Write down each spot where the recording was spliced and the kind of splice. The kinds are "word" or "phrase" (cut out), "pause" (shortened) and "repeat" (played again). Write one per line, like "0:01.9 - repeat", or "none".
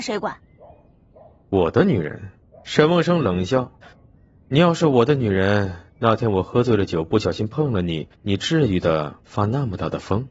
0:02.4 - pause
0:03.8 - pause
0:08.1 - pause
0:09.2 - pause